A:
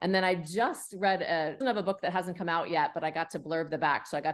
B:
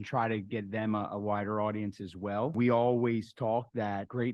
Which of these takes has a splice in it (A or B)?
A